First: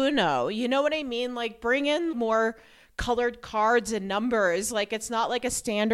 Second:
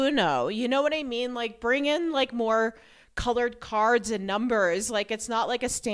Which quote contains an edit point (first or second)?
first